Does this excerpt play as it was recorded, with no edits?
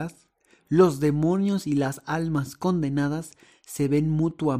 yes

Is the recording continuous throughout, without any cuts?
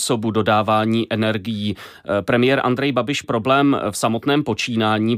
no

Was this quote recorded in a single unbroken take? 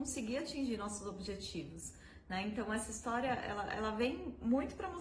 yes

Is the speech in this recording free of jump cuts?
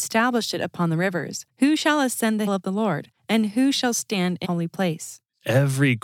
no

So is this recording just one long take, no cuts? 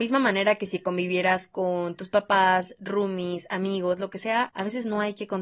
yes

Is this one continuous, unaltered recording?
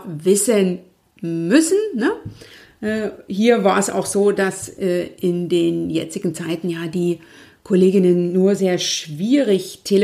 no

